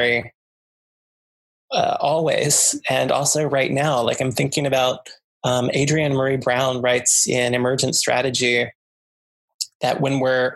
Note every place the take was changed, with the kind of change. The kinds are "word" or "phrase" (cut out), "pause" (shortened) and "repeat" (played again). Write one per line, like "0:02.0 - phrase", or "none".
none